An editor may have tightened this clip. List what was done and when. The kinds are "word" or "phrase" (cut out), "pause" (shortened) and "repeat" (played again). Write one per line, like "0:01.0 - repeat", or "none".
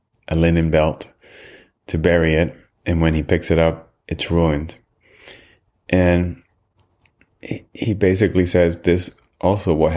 none